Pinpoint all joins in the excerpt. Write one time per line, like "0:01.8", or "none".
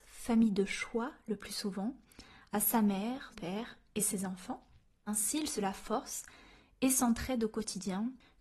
0:03.3
0:05.1
0:05.6